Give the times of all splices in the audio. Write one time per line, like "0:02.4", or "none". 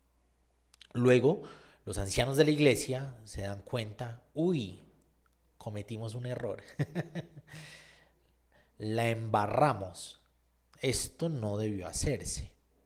none

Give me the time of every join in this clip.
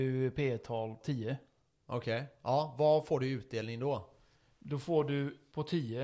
0:01.0

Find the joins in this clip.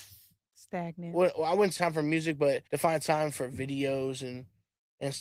0:01.8
0:02.7

